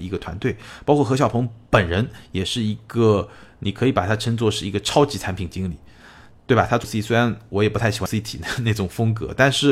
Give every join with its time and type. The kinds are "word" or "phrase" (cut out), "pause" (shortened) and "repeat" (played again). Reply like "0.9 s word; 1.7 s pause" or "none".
6.8 s word; 8.1 s word